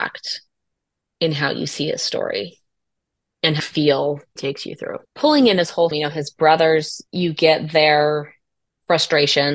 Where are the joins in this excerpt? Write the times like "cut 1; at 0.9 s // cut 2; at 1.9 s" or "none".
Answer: cut 1; at 3.6 s // cut 2; at 4.4 s // cut 3; at 5.1 s // cut 4; at 5.9 s // cut 5; at 7.1 s